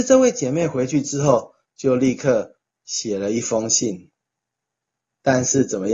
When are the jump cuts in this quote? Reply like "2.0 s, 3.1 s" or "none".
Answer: none